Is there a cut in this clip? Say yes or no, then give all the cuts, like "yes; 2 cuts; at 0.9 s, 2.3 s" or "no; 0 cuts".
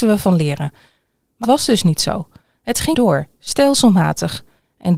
yes; 2 cuts; at 1.4 s, 2.9 s